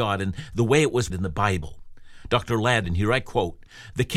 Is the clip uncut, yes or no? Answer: no